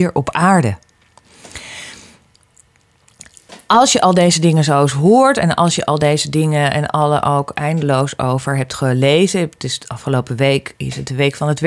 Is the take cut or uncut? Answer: uncut